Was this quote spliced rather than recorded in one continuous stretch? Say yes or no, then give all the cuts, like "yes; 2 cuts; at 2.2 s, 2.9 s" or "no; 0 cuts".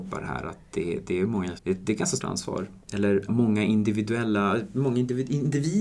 yes; 3 cuts; at 1.6 s, 2.2 s, 3.3 s